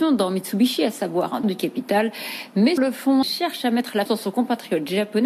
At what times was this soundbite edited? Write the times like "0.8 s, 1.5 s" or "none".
1.4 s, 2.8 s, 3.2 s, 4.1 s